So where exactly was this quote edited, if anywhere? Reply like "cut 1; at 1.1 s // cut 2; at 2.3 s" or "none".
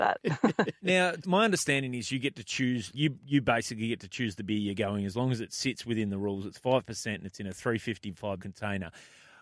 cut 1; at 1.2 s // cut 2; at 2.9 s // cut 3; at 8.4 s